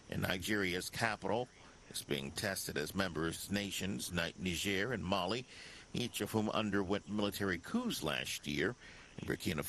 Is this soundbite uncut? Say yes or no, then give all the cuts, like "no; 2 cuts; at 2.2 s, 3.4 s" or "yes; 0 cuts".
yes; 0 cuts